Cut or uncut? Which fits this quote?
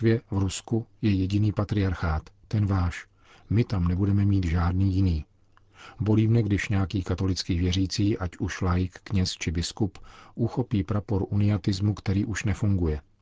uncut